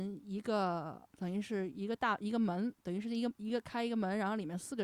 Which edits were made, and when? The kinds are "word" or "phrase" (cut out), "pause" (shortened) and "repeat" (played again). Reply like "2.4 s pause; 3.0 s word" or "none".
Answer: 1.1 s pause